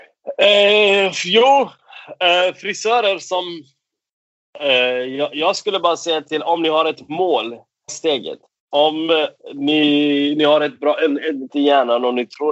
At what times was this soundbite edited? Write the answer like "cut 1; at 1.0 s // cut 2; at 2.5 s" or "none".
cut 1; at 7.9 s // cut 2; at 8.5 s // cut 3; at 11.5 s